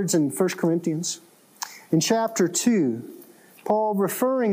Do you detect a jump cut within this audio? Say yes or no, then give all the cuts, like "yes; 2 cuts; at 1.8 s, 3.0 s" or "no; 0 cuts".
no; 0 cuts